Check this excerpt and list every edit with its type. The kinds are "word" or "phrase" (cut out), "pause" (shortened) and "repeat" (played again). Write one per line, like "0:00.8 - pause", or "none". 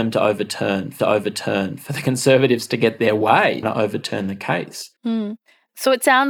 0:01.0 - repeat
0:03.6 - phrase
0:05.0 - pause